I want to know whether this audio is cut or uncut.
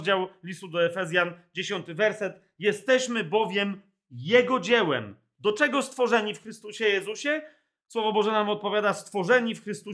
uncut